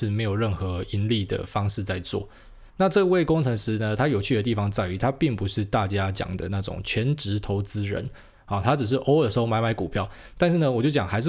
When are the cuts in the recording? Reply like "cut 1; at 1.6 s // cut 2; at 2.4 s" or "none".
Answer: none